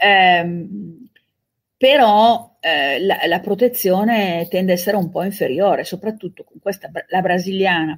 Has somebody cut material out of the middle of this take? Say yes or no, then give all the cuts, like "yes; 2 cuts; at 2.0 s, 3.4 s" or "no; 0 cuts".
no; 0 cuts